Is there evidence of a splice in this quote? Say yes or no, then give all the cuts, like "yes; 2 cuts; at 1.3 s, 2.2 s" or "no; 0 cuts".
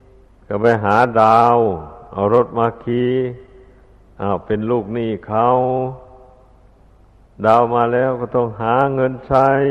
no; 0 cuts